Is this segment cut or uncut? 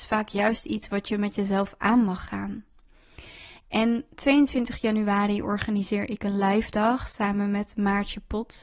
uncut